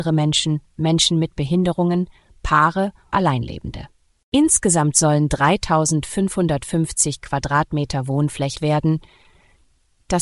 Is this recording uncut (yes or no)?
no